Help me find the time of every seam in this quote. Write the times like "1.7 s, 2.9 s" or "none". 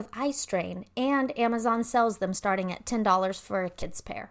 none